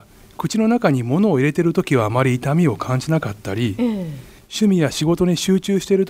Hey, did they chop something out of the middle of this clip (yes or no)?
no